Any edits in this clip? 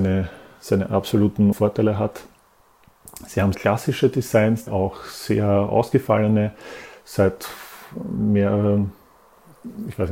yes; 3 cuts; at 1.5 s, 3.5 s, 4.7 s

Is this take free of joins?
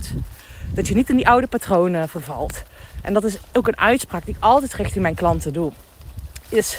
yes; 0 cuts

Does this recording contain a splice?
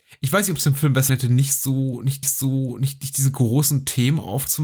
yes; 2 cuts; at 1.1 s, 2.2 s

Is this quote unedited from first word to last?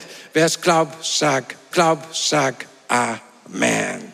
no; 1 cut; at 1.7 s

